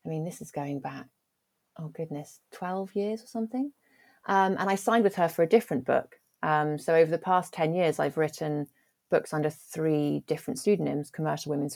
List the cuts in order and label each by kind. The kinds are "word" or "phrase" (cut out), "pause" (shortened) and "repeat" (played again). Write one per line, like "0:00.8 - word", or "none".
none